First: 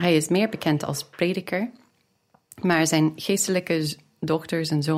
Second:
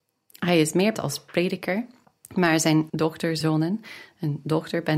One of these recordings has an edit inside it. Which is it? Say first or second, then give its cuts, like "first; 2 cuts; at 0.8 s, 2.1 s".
second; 4 cuts; at 0.9 s, 2.0 s, 2.9 s, 3.4 s